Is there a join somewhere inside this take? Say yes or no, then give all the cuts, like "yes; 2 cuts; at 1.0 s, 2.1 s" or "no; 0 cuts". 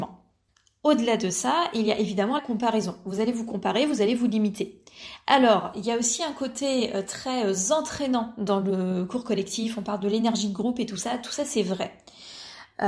yes; 1 cut; at 2.4 s